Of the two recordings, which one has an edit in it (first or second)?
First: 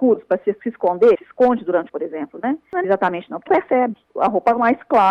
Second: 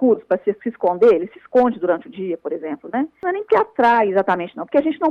first